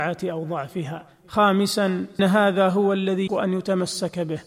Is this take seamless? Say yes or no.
no